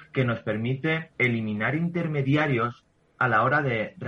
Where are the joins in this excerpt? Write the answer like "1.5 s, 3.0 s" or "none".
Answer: 1.1 s

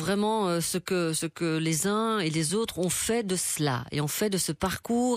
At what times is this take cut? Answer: none

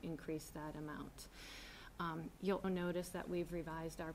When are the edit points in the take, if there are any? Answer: 2.6 s

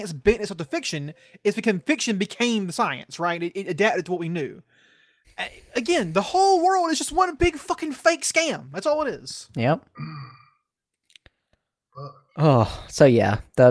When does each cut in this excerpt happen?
none

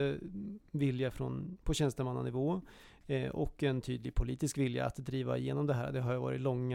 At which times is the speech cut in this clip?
none

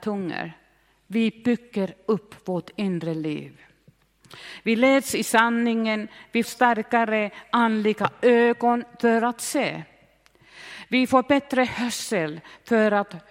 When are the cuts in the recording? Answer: 6.4 s

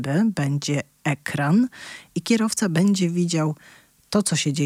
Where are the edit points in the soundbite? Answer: none

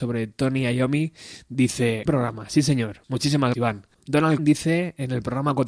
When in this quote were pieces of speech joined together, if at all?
2.1 s, 3.5 s, 4.4 s

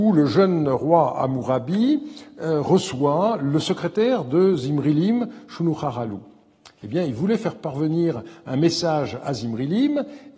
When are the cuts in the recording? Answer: none

